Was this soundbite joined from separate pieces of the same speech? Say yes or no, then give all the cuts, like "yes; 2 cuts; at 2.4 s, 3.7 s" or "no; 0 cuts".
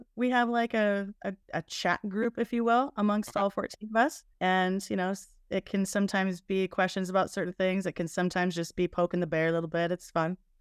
yes; 2 cuts; at 1.4 s, 4.3 s